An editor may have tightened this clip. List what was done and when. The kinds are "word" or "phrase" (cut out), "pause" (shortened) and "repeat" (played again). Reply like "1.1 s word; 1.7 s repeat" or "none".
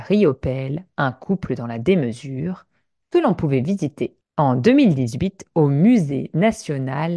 none